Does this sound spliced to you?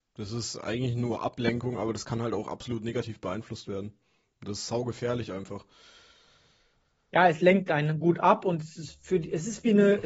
no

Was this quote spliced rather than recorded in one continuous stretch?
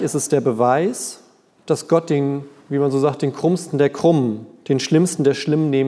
no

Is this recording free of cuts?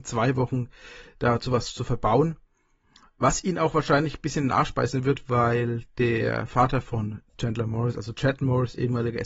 yes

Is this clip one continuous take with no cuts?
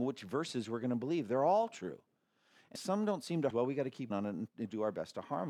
no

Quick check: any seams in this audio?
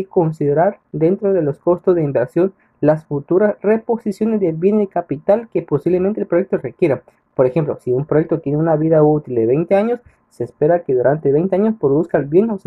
no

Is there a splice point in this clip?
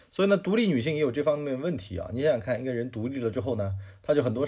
no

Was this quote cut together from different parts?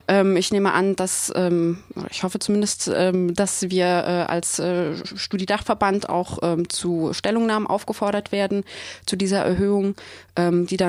no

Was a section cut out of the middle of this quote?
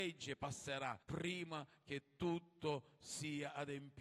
yes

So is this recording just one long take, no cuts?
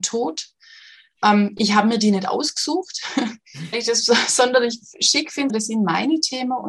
no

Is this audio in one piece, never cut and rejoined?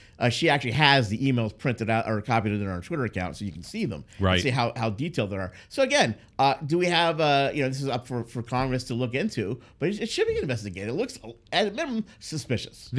yes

